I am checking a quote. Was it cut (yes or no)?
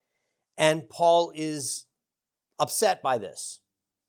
no